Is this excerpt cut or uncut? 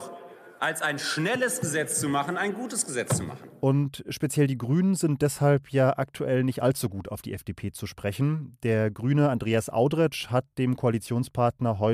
uncut